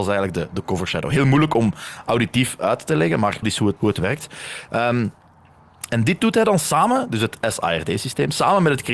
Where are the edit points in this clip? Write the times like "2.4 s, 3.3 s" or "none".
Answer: 3.4 s, 3.8 s

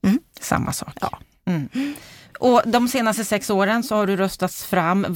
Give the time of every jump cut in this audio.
none

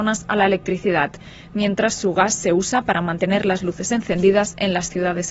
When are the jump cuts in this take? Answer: none

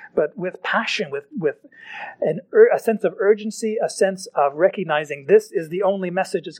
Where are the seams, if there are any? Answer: none

